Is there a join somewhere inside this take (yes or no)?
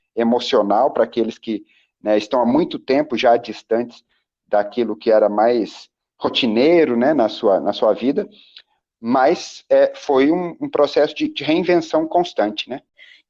no